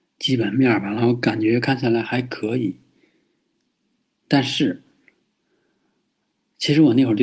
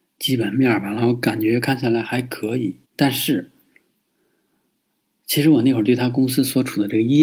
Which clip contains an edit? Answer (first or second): second